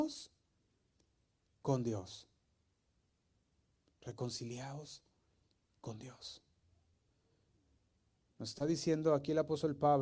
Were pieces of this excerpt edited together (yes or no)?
no